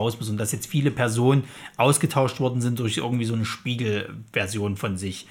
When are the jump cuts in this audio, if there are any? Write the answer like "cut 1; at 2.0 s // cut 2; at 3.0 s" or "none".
none

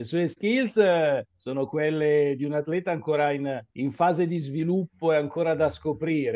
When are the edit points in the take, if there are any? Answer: cut 1; at 1.3 s // cut 2; at 3.7 s

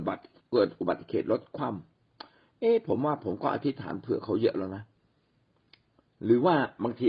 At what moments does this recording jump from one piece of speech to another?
none

